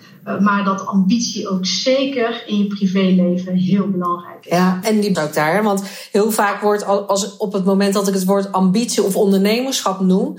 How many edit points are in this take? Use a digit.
2